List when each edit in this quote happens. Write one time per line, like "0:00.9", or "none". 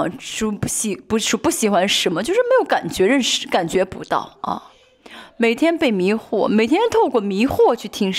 none